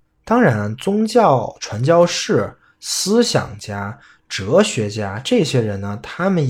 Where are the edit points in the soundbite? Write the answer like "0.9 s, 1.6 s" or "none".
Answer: none

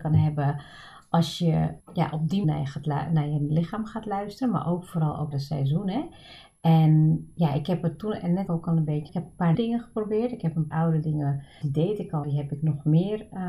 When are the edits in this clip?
1.8 s, 2.4 s, 5.3 s, 8.5 s, 9.1 s, 9.5 s, 10.7 s, 11.6 s, 12.2 s

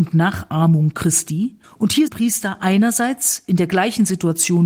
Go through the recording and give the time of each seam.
1.6 s, 2.1 s

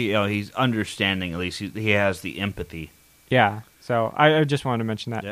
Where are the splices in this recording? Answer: none

